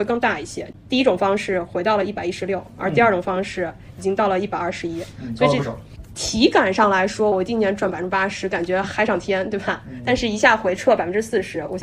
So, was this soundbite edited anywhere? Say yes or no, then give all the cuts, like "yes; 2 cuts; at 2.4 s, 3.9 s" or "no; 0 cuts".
yes; 1 cut; at 7.3 s